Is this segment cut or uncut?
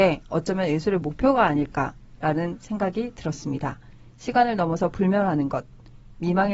uncut